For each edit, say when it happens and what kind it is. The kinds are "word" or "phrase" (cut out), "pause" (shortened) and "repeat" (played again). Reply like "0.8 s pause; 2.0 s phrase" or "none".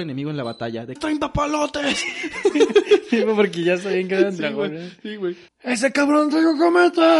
1.0 s phrase; 5.5 s pause